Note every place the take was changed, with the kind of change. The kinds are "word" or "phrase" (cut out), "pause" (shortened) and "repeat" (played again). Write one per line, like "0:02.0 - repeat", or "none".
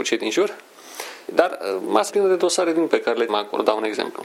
0:01.3 - word
0:02.1 - word
0:02.9 - word
0:03.3 - word